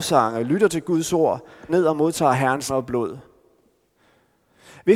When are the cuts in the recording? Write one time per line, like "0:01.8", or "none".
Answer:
0:01.7
0:02.7